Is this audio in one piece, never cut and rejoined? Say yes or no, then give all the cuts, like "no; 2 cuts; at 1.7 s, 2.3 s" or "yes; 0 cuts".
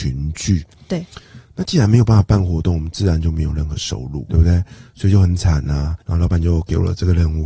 no; 2 cuts; at 4.3 s, 6.0 s